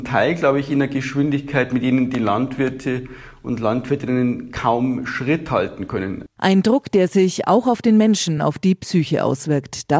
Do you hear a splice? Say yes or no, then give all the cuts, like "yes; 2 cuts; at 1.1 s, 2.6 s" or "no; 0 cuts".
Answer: no; 0 cuts